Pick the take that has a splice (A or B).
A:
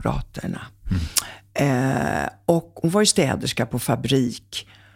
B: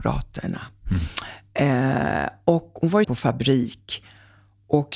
B